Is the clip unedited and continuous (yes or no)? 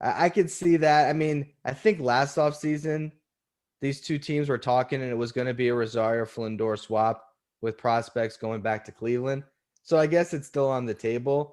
yes